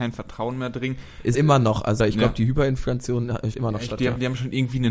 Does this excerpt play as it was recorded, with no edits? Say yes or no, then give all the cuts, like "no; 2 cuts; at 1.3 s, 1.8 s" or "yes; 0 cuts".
no; 4 cuts; at 1.3 s, 2.0 s, 3.5 s, 4.0 s